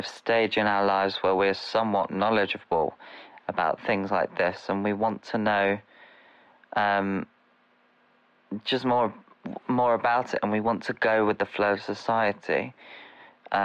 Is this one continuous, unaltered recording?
yes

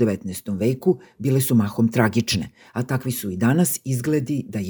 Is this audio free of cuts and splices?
yes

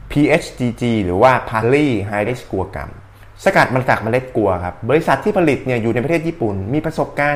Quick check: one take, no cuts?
no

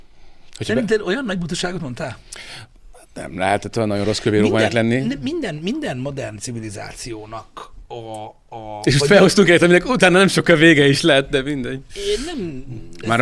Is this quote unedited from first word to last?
yes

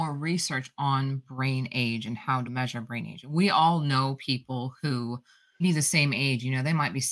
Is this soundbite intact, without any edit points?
no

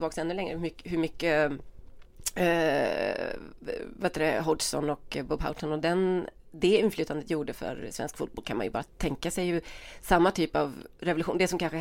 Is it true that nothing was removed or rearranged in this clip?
no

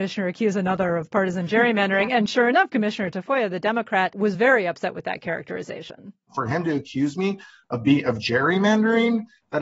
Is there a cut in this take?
no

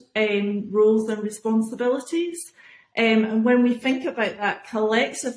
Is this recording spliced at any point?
no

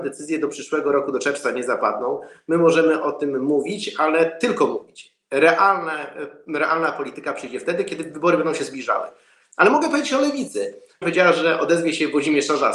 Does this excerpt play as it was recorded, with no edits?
no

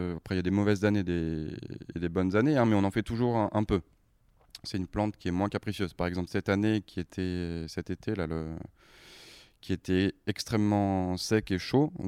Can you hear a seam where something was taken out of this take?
no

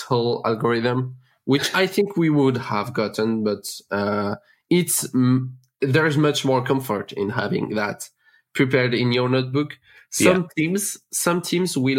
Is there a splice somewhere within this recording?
no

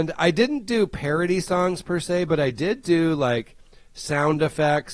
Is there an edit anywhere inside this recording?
no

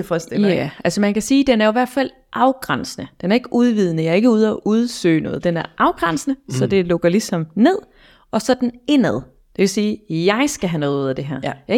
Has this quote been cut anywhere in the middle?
no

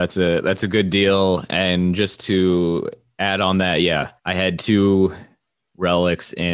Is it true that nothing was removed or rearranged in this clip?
no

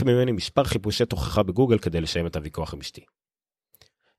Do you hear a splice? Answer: no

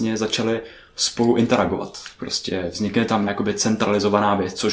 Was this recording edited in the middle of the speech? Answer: yes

